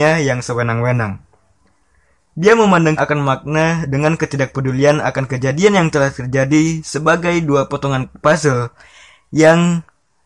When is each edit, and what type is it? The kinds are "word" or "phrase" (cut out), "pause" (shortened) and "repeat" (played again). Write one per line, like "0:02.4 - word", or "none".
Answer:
0:03.0 - phrase